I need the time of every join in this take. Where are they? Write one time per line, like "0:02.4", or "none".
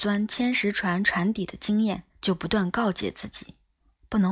0:02.1